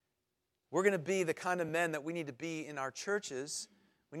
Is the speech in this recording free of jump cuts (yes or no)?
yes